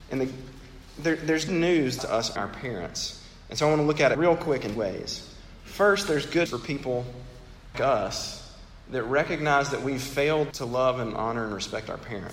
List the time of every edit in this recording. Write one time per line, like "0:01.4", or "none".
0:01.5
0:02.0
0:02.4
0:04.1
0:04.8
0:06.5
0:07.7
0:10.5